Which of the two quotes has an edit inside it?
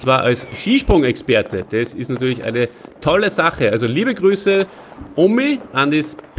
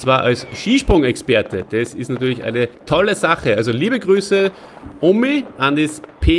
second; 1 cut; at 2.7 s

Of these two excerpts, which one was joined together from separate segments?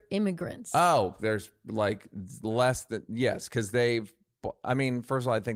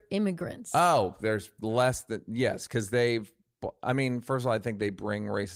second; 1 cut; at 1.6 s

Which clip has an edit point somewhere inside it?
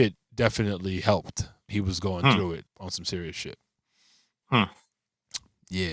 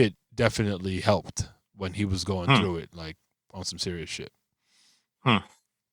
first; 2 cuts; at 1.7 s, 2.7 s

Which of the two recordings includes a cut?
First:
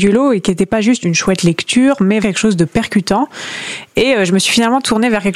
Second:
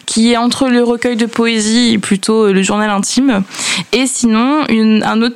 first; 2 cuts; at 1.0 s, 2.2 s

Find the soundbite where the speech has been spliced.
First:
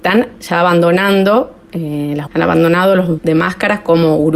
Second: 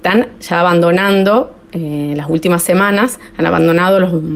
first; 2 cuts; at 2.3 s, 3.2 s

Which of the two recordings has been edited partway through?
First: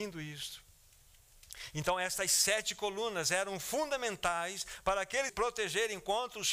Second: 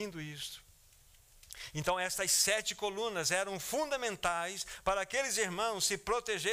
first; 1 cut; at 5.3 s

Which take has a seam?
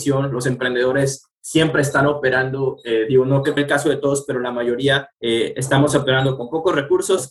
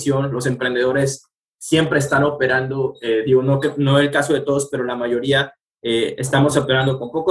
first; 3 cuts; at 1.3 s, 3.6 s, 5.1 s

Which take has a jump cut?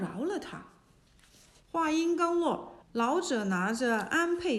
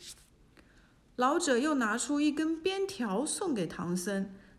first; 1 cut; at 2.8 s

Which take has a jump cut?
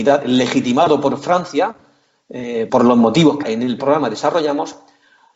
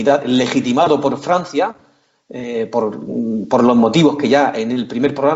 first; 3 cuts; at 2.7 s, 3.4 s, 3.8 s

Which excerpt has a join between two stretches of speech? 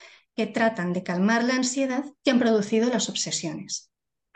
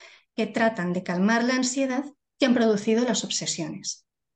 first; 1 cut; at 2.2 s

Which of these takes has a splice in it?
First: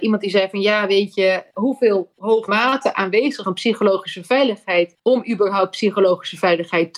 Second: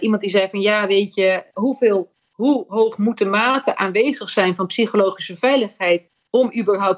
first; 4 cuts; at 2.2 s, 2.5 s, 3.4 s, 5.0 s

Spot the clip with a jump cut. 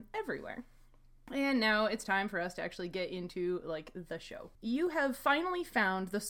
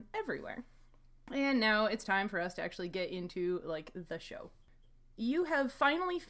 first; 1 cut; at 4.5 s

